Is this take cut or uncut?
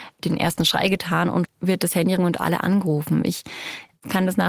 cut